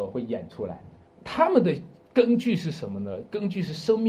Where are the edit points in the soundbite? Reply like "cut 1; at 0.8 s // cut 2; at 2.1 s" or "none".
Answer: cut 1; at 1.1 s